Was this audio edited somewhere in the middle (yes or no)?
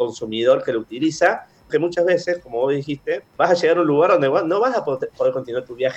yes